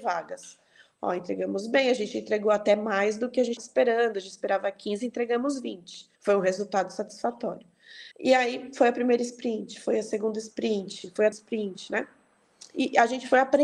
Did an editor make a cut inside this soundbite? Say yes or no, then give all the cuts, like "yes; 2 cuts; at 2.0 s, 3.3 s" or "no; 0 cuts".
yes; 4 cuts; at 3.6 s, 6.2 s, 8.1 s, 11.3 s